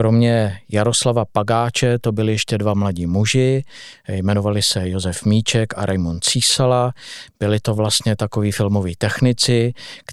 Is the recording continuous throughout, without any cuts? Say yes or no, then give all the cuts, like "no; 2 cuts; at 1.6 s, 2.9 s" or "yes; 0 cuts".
yes; 0 cuts